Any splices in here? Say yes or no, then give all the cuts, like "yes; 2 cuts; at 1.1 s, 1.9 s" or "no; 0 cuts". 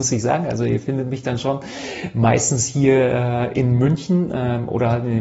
no; 0 cuts